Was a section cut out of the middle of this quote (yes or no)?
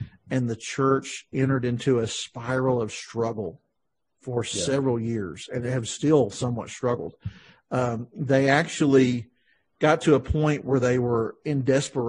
no